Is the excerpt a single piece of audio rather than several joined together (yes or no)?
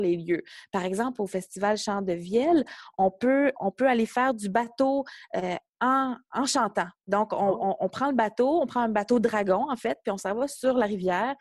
no